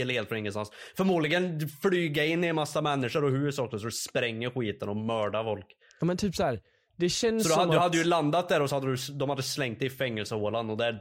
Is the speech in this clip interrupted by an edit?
no; 0 cuts

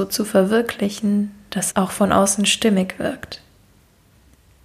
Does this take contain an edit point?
yes; 1 cut; at 1.7 s

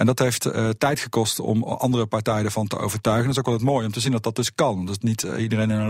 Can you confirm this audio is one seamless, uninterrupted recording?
yes; 0 cuts

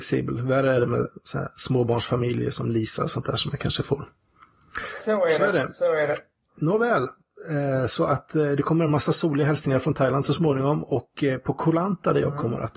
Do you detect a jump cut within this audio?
no; 0 cuts

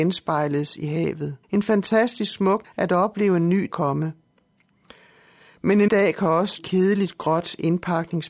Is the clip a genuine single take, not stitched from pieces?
no; 5 cuts; at 1.4 s, 2.6 s, 3.7 s, 5.9 s, 6.6 s

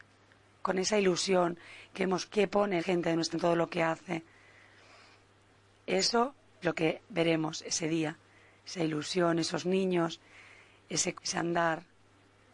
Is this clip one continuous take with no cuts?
no; 5 cuts; at 2.3 s, 2.8 s, 3.3 s, 6.6 s, 11.1 s

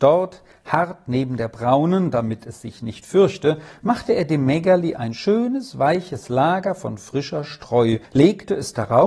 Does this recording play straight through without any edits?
no; 1 cut; at 8.0 s

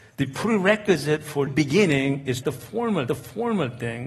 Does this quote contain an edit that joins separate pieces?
yes; 3 cuts; at 1.5 s, 2.4 s, 3.1 s

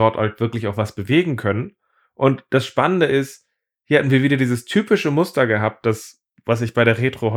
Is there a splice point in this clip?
no; 0 cuts

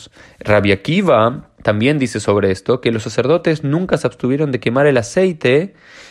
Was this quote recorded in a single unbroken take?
no; 1 cut; at 1.5 s

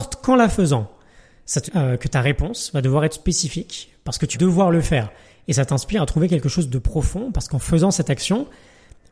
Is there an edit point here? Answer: yes; 3 cuts; at 1.7 s, 3.1 s, 4.3 s

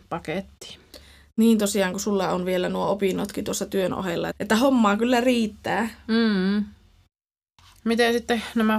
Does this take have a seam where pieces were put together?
yes; 1 cut; at 4.3 s

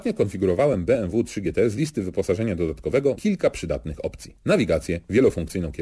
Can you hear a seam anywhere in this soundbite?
yes; 1 cut; at 3.2 s

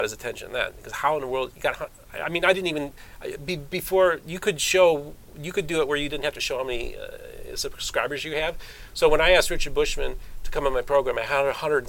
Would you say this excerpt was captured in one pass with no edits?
yes; 0 cuts

